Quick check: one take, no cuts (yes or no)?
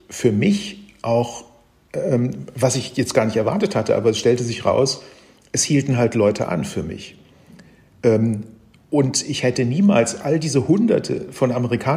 yes